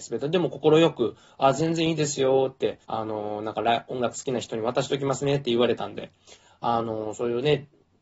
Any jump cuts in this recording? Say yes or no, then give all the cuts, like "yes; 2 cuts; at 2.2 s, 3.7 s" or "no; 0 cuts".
yes; 1 cut; at 2.8 s